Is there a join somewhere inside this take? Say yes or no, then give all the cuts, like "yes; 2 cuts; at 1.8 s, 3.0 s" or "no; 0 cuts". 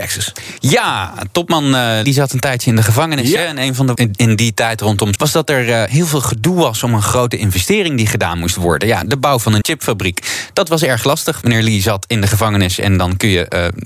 yes; 5 cuts; at 2.0 s, 4.0 s, 5.2 s, 9.6 s, 11.4 s